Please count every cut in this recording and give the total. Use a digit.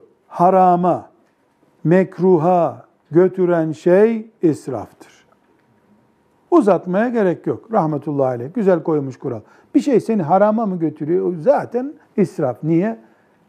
1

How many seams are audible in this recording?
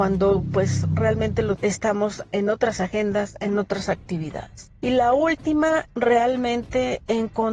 2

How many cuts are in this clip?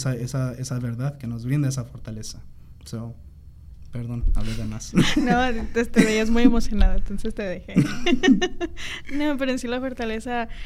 0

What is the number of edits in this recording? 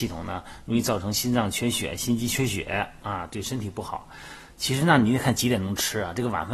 0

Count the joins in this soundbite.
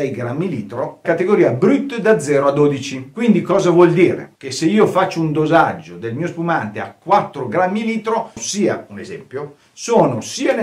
1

